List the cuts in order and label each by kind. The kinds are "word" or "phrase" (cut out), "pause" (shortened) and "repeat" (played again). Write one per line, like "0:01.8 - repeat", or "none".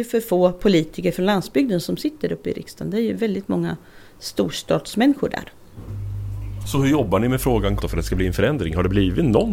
0:07.8 - word